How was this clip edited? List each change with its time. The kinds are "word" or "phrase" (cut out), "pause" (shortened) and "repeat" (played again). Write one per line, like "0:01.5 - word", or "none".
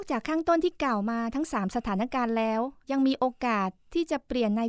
0:02.8 - pause